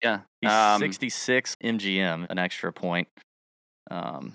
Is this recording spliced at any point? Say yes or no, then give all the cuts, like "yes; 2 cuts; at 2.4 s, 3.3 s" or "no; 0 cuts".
yes; 2 cuts; at 1.5 s, 2.3 s